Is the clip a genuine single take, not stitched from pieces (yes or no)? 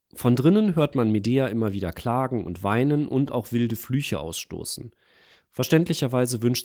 yes